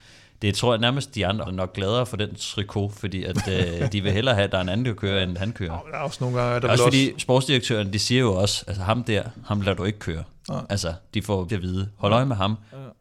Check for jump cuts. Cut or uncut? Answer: cut